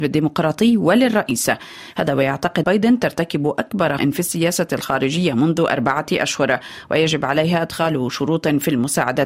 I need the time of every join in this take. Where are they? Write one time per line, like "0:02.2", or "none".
0:02.6
0:04.0